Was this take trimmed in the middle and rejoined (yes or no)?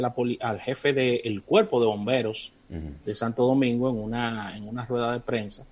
no